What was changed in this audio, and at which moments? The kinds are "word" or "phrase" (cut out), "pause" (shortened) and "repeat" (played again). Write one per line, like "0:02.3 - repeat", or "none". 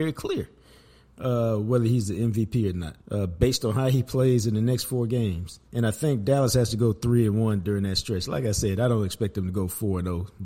0:03.0 - pause
0:05.7 - pause